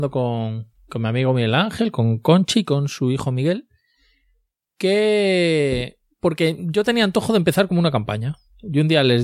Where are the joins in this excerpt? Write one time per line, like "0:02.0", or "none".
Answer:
none